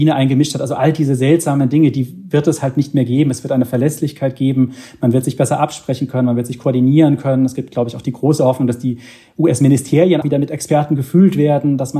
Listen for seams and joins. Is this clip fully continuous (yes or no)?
no